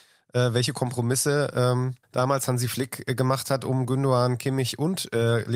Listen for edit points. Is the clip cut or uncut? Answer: cut